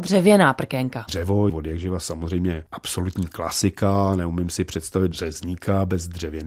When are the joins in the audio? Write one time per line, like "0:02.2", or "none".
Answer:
0:01.5